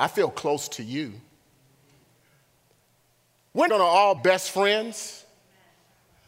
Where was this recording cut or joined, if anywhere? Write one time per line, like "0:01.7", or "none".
0:03.7
0:04.2